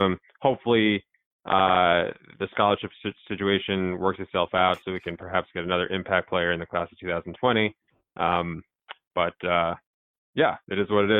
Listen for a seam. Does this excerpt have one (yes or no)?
no